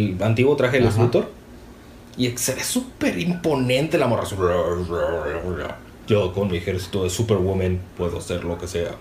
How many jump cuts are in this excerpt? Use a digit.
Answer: 0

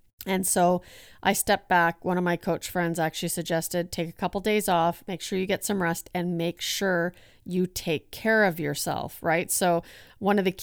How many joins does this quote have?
0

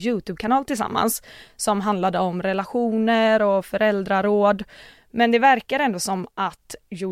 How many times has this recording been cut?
0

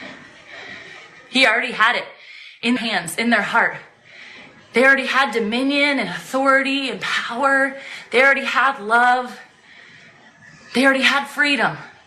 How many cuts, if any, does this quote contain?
1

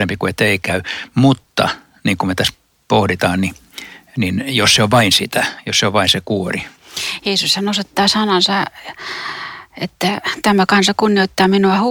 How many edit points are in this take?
0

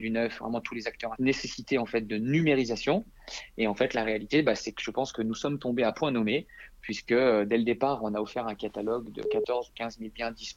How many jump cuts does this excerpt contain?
1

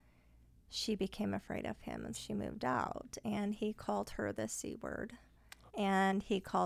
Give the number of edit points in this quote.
2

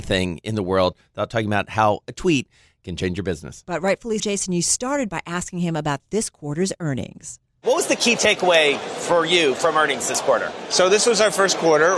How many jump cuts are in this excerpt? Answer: 1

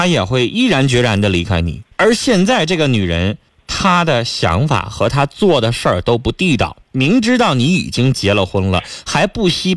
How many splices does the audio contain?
3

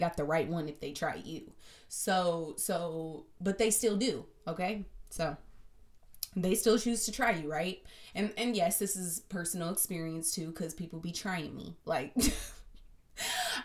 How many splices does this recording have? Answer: 1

